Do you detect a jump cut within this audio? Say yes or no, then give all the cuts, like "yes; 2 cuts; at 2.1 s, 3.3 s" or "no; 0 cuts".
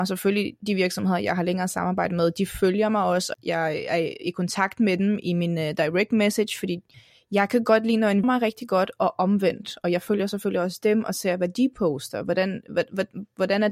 yes; 3 cuts; at 3.3 s, 6.9 s, 8.2 s